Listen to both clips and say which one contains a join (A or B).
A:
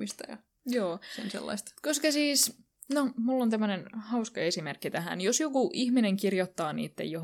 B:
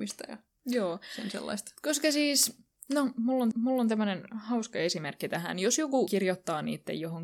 B